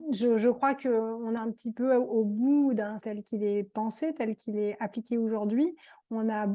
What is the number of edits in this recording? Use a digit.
2